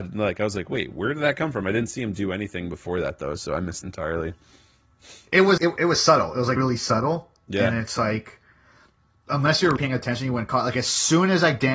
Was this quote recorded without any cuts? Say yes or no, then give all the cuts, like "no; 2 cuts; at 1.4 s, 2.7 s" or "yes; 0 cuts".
no; 4 cuts; at 3.8 s, 5.6 s, 6.6 s, 9.8 s